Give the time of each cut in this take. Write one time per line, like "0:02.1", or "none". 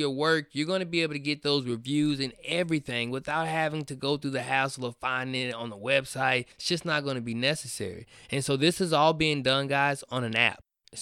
0:06.5